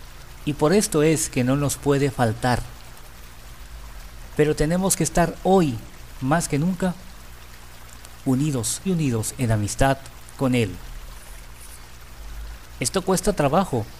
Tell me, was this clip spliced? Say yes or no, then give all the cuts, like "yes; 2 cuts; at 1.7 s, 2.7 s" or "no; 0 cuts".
yes; 1 cut; at 8.9 s